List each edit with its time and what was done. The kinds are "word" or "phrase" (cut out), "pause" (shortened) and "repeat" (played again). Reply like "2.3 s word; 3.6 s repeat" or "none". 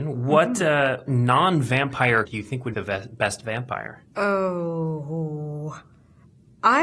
1.1 s word; 2.2 s word; 2.7 s word; 4.1 s pause